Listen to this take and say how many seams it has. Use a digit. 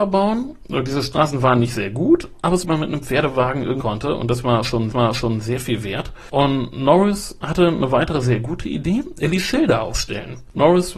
3